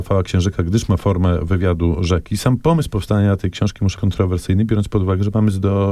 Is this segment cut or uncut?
cut